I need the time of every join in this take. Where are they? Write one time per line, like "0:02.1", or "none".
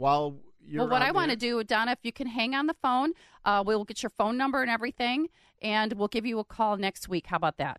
none